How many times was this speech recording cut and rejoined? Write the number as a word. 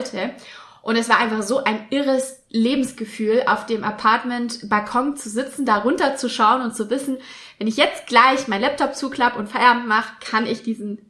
zero